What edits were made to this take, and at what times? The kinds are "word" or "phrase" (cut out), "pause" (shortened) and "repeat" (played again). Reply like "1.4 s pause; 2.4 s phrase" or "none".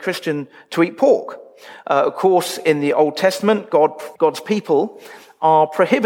4.2 s pause